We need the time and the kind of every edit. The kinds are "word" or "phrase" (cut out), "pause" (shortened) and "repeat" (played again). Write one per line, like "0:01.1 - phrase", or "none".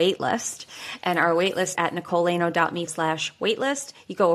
0:01.8 - word
0:02.9 - word